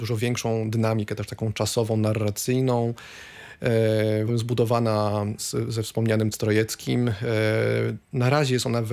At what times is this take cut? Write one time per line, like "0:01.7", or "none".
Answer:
0:04.3
0:05.4
0:06.3